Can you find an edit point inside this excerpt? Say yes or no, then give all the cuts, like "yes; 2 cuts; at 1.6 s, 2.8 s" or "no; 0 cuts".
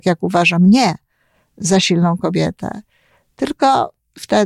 no; 0 cuts